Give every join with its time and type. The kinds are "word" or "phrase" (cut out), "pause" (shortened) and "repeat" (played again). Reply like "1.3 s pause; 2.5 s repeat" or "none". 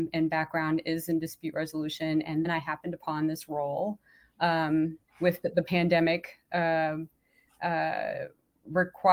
2.4 s word; 5.1 s pause